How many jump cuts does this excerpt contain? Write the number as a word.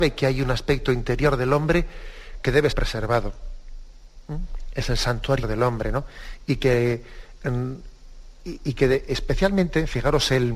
two